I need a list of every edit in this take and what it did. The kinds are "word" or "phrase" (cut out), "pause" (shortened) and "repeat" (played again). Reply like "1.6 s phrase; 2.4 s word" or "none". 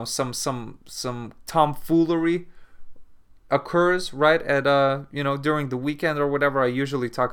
none